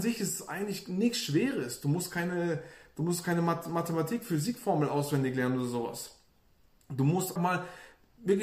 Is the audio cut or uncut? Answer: cut